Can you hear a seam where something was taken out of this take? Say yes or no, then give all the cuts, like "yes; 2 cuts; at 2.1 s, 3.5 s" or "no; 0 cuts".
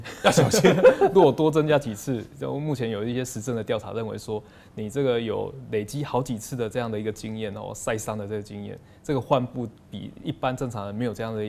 no; 0 cuts